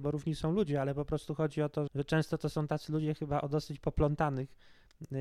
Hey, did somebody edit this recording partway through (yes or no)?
yes